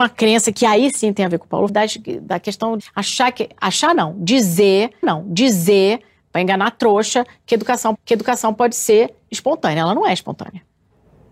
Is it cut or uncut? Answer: cut